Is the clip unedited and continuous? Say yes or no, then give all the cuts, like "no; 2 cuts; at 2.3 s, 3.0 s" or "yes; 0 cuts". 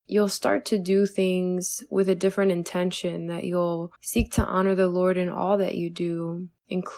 no; 1 cut; at 4.0 s